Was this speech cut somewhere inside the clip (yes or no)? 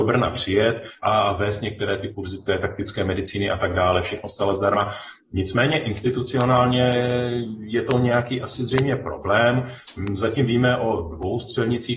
no